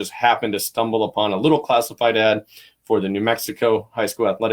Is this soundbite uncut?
yes; 0 cuts

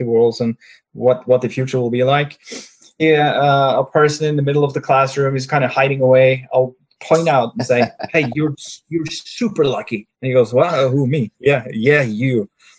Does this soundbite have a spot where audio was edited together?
yes; 2 cuts; at 3.0 s, 10.1 s

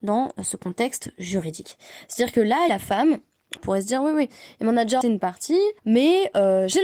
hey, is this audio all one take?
no; 4 cuts; at 2.7 s, 3.6 s, 5.0 s, 5.8 s

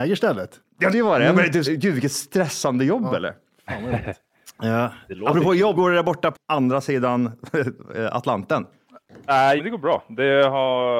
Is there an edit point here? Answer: yes; 5 cuts; at 0.9 s, 1.7 s, 5.8 s, 6.3 s, 9.6 s

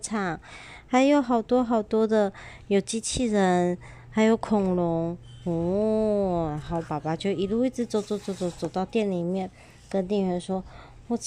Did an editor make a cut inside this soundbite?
no; 0 cuts

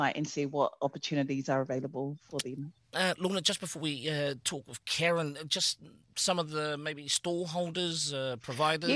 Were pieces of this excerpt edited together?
no; 0 cuts

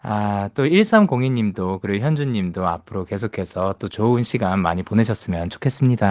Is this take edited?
no; 0 cuts

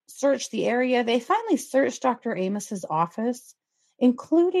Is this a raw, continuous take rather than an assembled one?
yes; 0 cuts

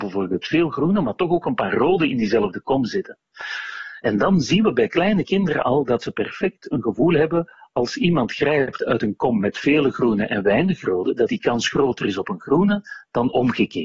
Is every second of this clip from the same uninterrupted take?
yes; 0 cuts

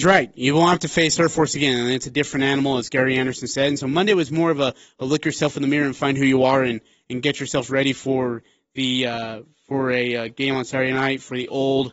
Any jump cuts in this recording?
no; 0 cuts

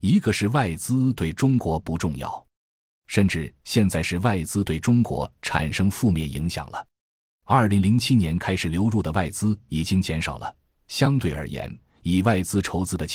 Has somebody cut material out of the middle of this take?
no; 0 cuts

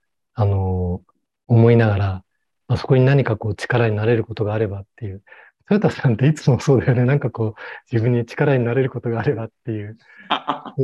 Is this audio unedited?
yes; 0 cuts

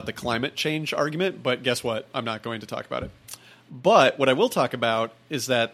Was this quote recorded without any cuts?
yes; 0 cuts

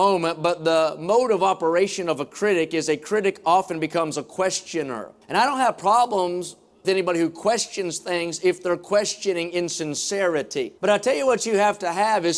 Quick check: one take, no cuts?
no; 3 cuts; at 5.2 s, 6.8 s, 10.8 s

